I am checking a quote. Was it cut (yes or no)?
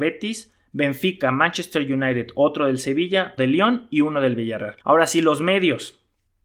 yes